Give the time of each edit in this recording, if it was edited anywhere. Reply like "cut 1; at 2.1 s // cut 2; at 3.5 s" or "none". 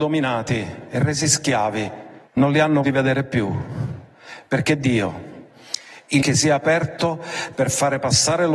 cut 1; at 2.3 s // cut 2; at 2.8 s // cut 3; at 6.2 s